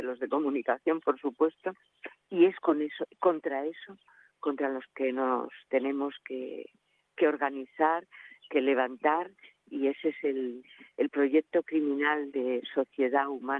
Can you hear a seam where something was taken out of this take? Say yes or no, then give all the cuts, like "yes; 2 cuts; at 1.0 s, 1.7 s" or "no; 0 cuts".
no; 0 cuts